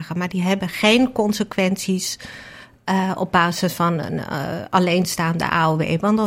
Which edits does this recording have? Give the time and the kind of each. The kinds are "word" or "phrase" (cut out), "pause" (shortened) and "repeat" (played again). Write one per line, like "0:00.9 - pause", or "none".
none

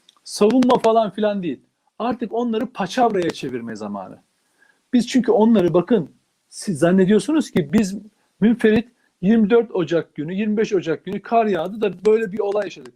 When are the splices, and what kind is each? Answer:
none

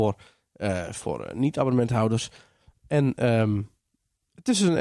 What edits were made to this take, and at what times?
none

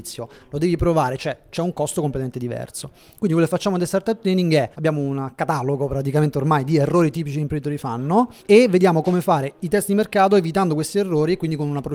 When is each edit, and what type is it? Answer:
0:04.7 - pause
0:08.4 - pause

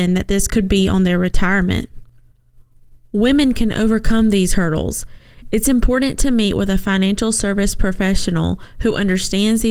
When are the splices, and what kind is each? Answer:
none

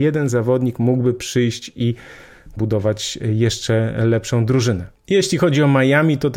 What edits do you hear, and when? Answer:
0:02.6 - phrase

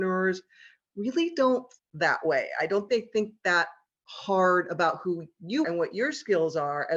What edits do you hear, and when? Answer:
0:01.8 - word
0:02.9 - word
0:05.6 - word

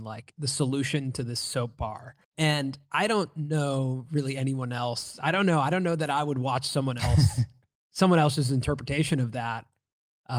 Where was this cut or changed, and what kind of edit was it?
0:02.2 - pause

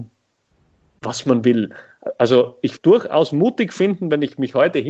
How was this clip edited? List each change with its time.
0:02.8 - word

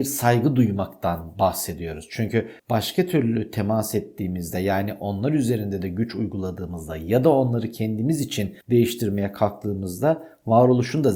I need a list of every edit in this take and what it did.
0:02.6 - pause
0:08.6 - pause

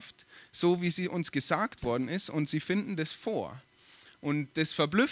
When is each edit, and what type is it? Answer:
none

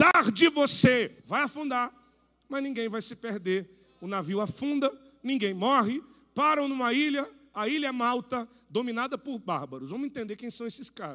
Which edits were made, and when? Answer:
0:01.2 - pause

